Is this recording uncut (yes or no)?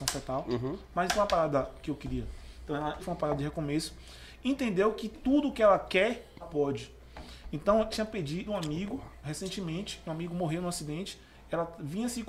no